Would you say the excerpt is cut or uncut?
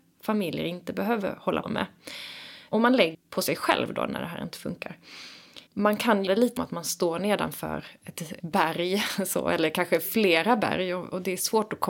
cut